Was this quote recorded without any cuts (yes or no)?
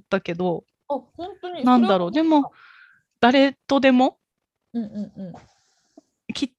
yes